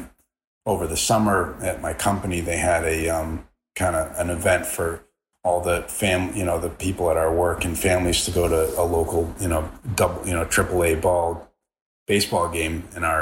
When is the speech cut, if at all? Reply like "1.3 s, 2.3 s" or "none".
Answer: none